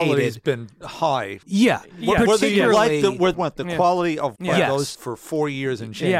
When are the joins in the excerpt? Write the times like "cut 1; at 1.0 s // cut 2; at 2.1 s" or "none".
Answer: cut 1; at 1.4 s // cut 2; at 3.3 s // cut 3; at 4.4 s // cut 4; at 4.9 s